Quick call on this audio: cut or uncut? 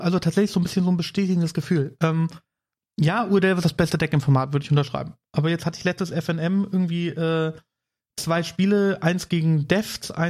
uncut